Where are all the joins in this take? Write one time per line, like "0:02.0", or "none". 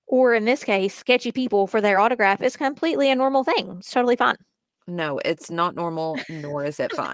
none